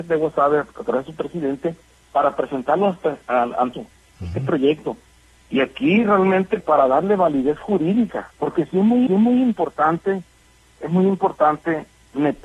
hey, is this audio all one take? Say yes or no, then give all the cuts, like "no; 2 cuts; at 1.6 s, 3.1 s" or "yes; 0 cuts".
no; 4 cuts; at 3.7 s, 6.6 s, 8.3 s, 9.1 s